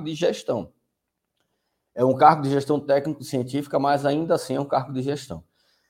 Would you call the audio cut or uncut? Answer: uncut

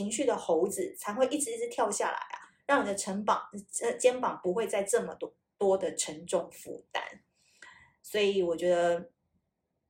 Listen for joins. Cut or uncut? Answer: uncut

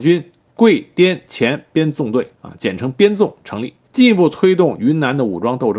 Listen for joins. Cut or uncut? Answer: cut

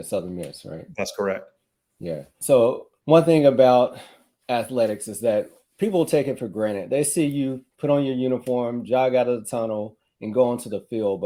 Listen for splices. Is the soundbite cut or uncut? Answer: cut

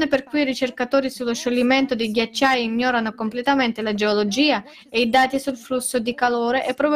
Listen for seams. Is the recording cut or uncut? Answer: uncut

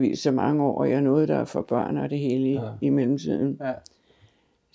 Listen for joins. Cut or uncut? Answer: uncut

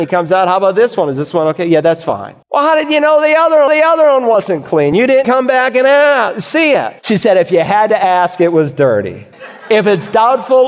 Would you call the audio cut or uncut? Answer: cut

